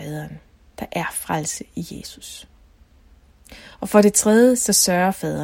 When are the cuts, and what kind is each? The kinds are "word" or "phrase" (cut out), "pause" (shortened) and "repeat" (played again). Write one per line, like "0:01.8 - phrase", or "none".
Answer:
none

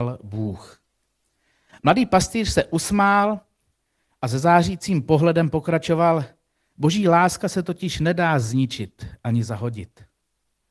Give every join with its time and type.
none

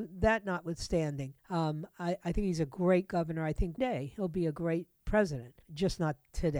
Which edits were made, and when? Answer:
0:01.4 - pause
0:03.8 - word
0:05.6 - pause

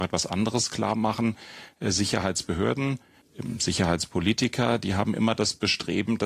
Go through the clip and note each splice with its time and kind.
none

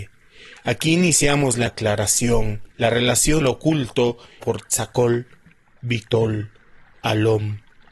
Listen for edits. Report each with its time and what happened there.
0:01.7 - phrase
0:02.7 - pause
0:03.4 - word
0:04.4 - phrase

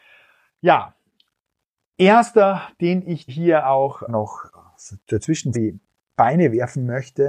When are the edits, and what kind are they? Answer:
0:02.8 - word
0:03.3 - word
0:04.1 - word
0:05.5 - word

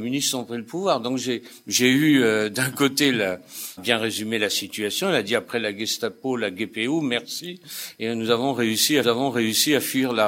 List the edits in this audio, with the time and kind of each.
0:03.8 - phrase
0:09.0 - repeat

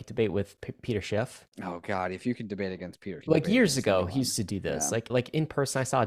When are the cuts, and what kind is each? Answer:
0:01.5 - pause
0:03.2 - phrase
0:05.1 - word

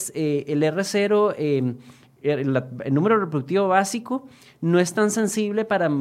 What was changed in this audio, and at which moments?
none

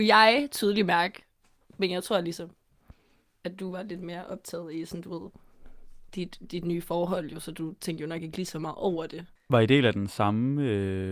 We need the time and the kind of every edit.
none

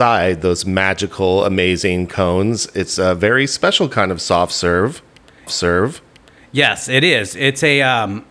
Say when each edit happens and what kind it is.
0:05.5 - repeat

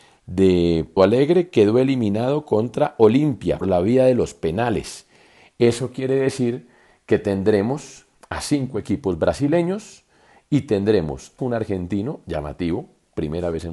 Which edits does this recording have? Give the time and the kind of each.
0:01.0 - word
0:03.6 - word
0:11.4 - word

